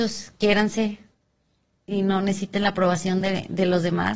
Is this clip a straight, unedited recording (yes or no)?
yes